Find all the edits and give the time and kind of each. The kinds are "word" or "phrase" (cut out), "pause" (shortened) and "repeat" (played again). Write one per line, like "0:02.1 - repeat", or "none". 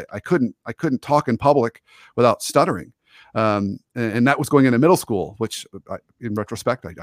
none